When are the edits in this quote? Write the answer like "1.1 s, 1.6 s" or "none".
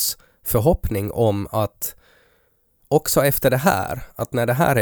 none